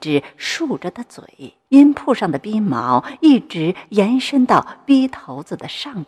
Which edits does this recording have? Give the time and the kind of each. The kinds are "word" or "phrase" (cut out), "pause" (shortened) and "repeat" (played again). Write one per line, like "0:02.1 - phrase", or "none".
0:01.6 - pause